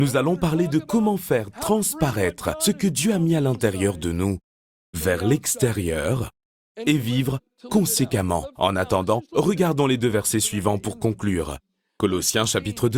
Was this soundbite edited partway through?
no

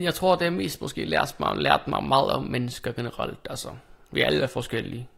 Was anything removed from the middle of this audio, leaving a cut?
no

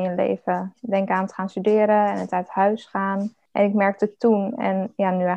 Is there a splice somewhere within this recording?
no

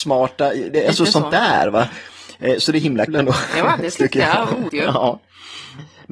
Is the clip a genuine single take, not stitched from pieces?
no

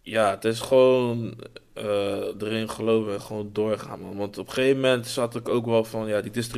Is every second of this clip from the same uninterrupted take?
yes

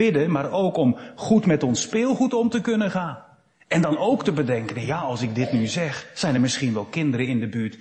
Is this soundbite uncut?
yes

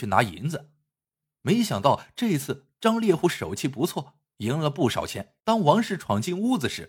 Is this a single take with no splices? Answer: no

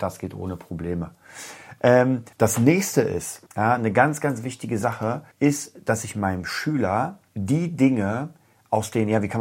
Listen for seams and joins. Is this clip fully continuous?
no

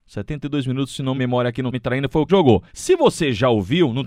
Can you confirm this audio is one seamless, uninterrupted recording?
no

